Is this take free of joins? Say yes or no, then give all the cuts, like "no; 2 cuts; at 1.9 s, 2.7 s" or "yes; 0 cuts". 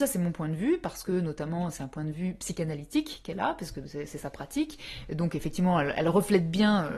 yes; 0 cuts